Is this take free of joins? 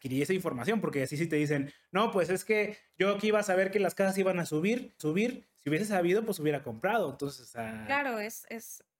no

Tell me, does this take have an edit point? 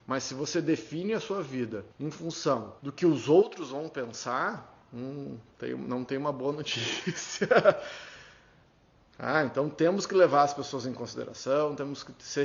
yes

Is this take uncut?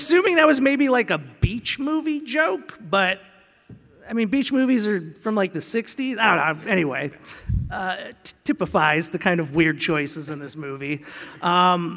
yes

